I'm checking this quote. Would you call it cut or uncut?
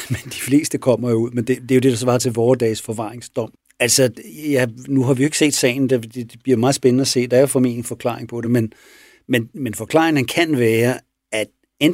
uncut